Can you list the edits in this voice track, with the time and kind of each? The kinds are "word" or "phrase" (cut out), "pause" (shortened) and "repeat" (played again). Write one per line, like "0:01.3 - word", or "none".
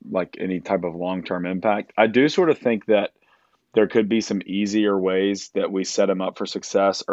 none